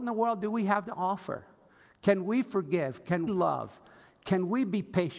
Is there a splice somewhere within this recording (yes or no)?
yes